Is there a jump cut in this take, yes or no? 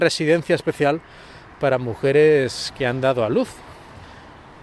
no